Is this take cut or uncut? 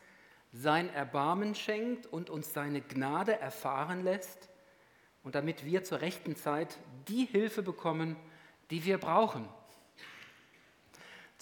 uncut